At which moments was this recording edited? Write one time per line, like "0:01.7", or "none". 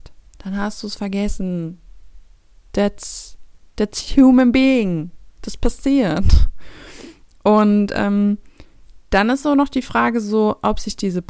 none

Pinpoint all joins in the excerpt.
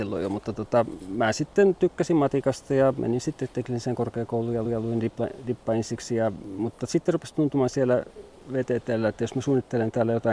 0:04.6

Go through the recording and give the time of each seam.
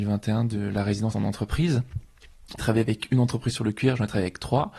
0:01.1
0:02.6

